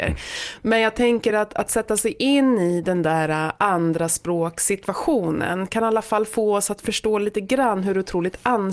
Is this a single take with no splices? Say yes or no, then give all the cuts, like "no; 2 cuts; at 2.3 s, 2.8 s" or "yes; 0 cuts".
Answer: yes; 0 cuts